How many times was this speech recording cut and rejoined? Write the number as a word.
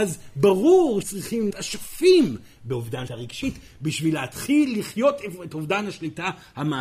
three